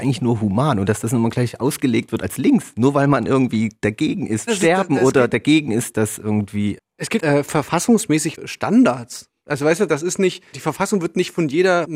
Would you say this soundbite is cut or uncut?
cut